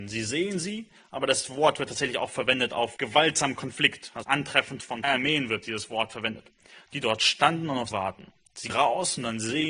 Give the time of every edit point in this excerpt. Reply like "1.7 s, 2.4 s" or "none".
3.0 s, 4.2 s, 5.0 s, 7.9 s, 8.7 s